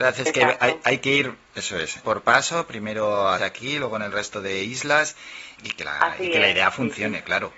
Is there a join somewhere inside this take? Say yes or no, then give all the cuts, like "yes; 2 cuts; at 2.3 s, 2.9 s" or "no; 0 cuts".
yes; 3 cuts; at 2.0 s, 3.4 s, 5.6 s